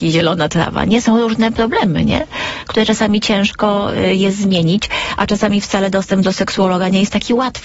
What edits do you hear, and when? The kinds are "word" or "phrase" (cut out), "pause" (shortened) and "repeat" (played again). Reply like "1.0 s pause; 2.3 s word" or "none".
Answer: none